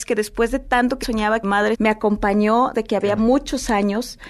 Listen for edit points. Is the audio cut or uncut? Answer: cut